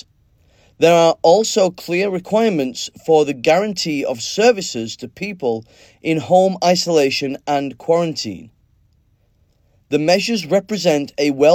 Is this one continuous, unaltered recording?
yes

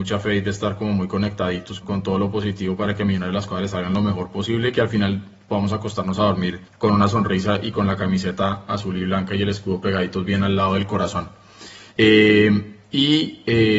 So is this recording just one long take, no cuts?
no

